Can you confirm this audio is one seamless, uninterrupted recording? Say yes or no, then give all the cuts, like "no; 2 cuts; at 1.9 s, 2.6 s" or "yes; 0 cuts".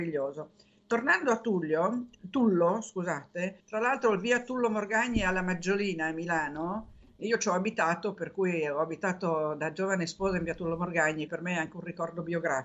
no; 3 cuts; at 3.6 s, 7.2 s, 11.3 s